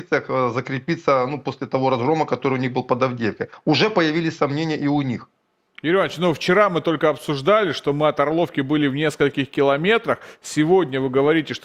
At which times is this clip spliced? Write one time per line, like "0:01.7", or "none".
none